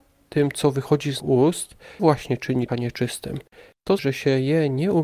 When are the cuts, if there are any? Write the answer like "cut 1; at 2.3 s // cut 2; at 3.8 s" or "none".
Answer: cut 1; at 1.2 s // cut 2; at 2.0 s // cut 3; at 2.7 s // cut 4; at 4.0 s